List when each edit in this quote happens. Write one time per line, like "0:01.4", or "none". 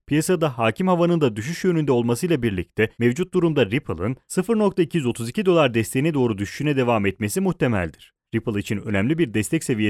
0:02.9
0:08.2